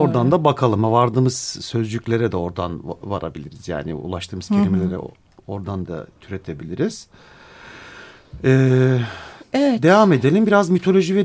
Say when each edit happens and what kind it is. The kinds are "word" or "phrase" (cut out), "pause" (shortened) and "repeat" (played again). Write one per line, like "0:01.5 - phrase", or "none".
none